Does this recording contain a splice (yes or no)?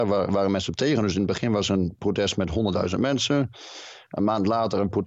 no